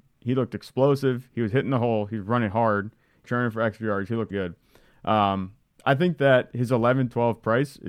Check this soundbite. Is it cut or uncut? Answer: cut